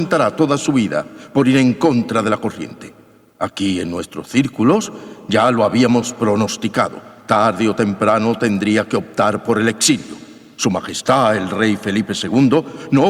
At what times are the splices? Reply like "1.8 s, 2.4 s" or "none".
none